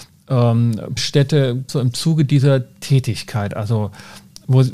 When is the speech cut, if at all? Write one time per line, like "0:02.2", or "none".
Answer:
0:01.0
0:01.7